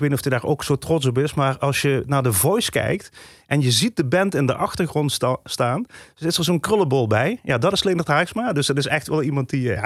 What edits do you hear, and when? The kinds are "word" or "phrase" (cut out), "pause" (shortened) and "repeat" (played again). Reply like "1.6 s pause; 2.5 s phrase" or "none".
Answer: none